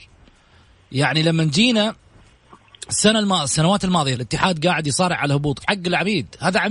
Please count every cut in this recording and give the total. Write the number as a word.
two